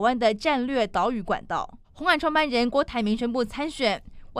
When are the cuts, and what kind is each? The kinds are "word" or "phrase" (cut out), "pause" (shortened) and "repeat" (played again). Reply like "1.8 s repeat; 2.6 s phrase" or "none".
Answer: 1.8 s pause